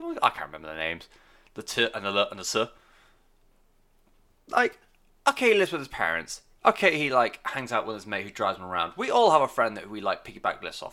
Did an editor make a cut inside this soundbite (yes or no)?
no